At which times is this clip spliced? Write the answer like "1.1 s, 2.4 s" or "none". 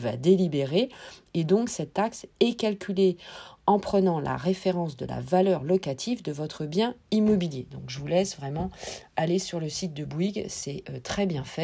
none